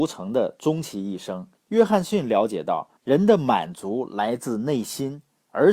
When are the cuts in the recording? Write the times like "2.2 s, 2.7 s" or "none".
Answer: 1.6 s, 3.0 s